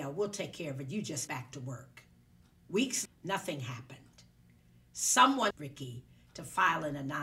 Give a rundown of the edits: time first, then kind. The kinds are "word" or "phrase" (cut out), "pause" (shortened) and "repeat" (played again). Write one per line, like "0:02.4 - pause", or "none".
0:01.3 - word
0:03.1 - word
0:05.5 - word